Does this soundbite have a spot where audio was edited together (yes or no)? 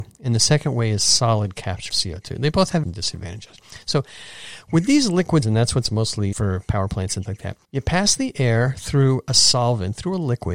yes